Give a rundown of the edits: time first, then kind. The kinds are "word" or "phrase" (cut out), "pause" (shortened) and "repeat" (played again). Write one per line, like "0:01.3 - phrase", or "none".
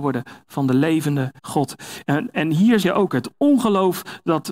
0:01.4 - pause
0:02.8 - word